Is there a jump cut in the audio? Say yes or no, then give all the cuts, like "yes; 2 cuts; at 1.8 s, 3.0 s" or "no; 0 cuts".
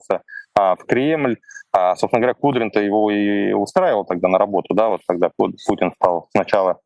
no; 0 cuts